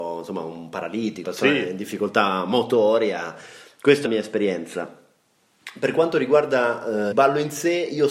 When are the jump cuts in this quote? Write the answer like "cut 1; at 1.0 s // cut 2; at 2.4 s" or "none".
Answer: cut 1; at 1.2 s // cut 2; at 4.0 s // cut 3; at 7.1 s